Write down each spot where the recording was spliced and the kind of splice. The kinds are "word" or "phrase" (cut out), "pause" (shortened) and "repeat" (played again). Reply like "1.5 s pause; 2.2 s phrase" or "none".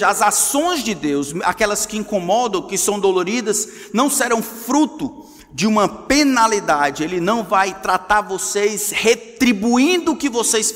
none